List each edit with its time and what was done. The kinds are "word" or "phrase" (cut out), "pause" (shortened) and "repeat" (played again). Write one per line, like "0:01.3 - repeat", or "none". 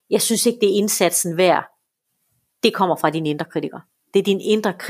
none